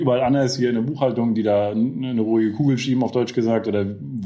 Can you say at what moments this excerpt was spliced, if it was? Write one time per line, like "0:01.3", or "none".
none